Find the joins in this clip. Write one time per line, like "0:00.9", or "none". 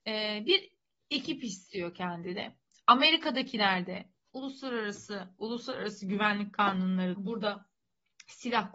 0:05.4
0:07.1